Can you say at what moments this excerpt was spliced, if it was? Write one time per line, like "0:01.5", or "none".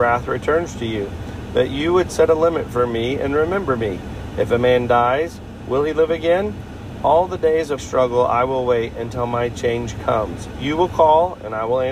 0:07.8